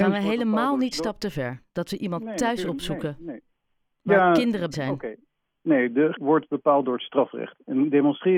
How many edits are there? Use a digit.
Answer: 3